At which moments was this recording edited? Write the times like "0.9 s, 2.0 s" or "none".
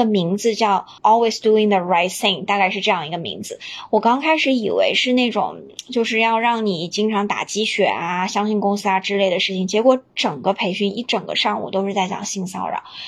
1.0 s